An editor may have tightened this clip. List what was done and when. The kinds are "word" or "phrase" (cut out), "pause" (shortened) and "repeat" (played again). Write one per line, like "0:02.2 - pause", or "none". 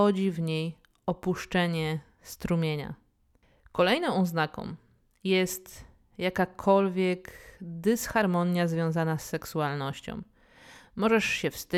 none